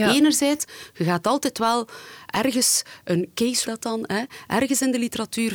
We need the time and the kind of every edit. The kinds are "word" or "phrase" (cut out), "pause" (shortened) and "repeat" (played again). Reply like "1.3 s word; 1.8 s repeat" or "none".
3.6 s phrase